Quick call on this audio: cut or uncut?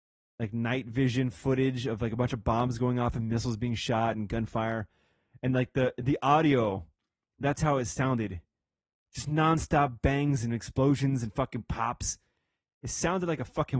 uncut